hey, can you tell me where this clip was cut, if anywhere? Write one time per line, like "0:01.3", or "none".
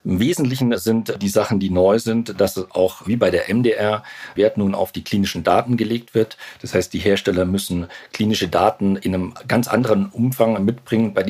0:04.4